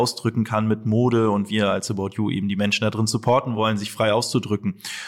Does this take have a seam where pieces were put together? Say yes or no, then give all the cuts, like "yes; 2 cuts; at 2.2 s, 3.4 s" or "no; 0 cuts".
no; 0 cuts